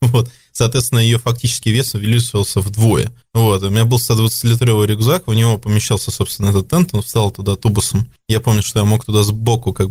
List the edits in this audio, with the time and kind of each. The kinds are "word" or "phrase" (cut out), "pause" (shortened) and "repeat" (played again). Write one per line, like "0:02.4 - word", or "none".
none

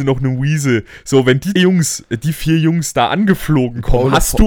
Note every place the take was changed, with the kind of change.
0:01.6 - word

